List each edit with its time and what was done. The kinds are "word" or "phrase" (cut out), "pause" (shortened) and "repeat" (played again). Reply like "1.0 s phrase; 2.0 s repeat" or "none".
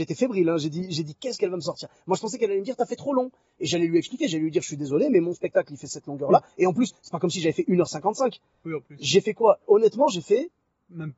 none